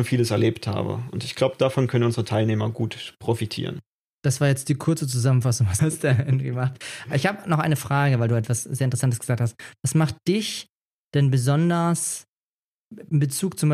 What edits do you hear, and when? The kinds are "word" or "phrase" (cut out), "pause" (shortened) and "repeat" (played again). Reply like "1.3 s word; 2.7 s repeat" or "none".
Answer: 4.0 s pause; 5.8 s word